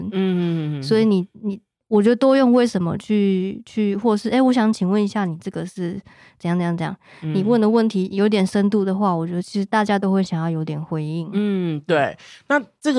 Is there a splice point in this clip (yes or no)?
no